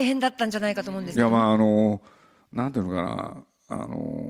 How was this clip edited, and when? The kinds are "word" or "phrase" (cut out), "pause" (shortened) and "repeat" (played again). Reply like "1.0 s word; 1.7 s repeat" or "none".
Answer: none